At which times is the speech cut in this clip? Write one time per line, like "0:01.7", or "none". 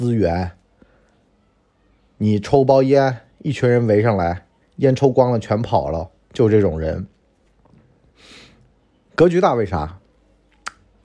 none